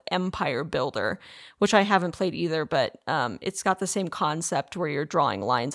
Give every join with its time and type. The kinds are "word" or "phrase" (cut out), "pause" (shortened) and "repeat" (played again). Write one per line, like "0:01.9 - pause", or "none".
none